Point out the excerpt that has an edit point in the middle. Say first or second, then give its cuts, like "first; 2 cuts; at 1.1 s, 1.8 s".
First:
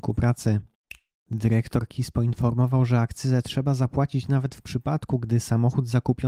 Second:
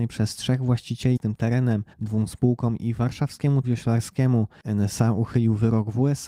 second; 3 cuts; at 1.2 s, 1.9 s, 3.6 s